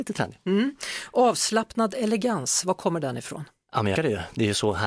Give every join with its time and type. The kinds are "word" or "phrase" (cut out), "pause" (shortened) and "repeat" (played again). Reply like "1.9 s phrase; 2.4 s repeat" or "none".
4.0 s word